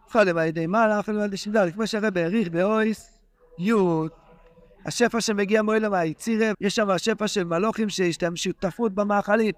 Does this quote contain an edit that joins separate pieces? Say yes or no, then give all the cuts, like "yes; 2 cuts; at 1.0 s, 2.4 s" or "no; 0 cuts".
yes; 1 cut; at 6.5 s